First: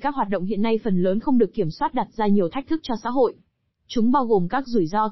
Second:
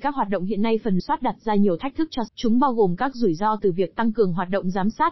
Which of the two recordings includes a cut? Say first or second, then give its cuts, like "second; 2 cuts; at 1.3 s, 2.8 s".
second; 2 cuts; at 1.0 s, 2.3 s